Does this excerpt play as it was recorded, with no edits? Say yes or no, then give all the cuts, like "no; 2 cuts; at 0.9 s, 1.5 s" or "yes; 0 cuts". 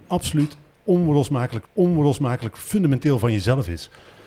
no; 1 cut; at 1.6 s